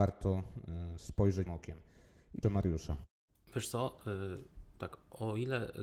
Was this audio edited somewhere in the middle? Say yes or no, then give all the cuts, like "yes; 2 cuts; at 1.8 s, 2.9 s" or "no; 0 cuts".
yes; 3 cuts; at 1.5 s, 2.4 s, 4.8 s